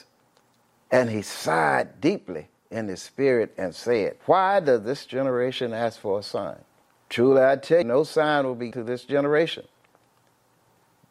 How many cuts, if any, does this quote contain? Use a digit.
4